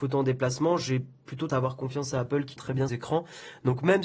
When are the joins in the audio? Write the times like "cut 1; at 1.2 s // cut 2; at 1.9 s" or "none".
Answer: cut 1; at 1.5 s // cut 2; at 2.6 s // cut 3; at 2.9 s